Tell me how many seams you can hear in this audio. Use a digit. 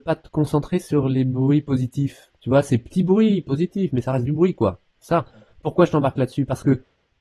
0